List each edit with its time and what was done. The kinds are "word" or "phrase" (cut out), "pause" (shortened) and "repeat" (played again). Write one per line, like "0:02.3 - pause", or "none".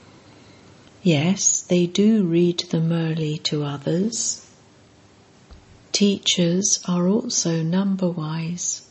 none